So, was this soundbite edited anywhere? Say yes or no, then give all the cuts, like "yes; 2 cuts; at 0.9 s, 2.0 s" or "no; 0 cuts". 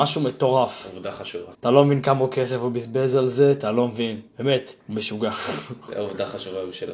yes; 2 cuts; at 1.5 s, 4.8 s